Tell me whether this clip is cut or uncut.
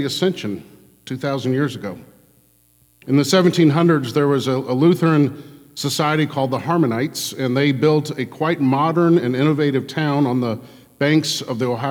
uncut